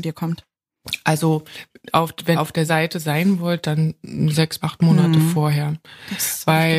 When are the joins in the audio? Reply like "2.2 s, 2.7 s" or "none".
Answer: 2.3 s, 2.7 s, 4.6 s